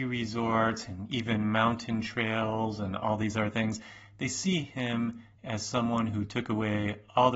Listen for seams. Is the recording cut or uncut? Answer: uncut